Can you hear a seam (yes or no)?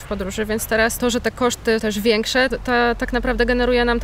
yes